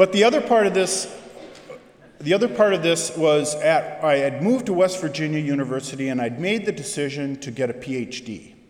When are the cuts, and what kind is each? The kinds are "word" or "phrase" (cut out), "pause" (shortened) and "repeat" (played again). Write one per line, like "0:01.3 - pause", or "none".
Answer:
none